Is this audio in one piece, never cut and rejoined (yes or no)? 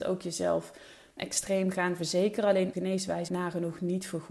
no